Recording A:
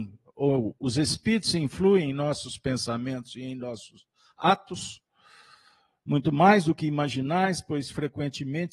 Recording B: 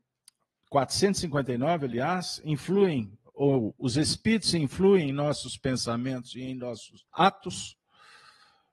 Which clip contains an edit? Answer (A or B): B